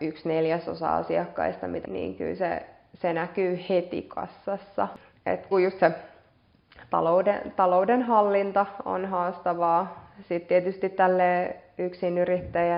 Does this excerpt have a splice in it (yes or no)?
yes